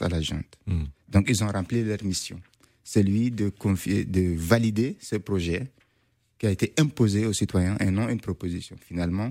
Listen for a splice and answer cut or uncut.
uncut